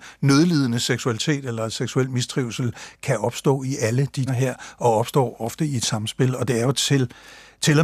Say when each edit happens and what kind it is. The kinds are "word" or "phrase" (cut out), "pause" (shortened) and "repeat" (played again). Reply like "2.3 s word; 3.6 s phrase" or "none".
4.3 s phrase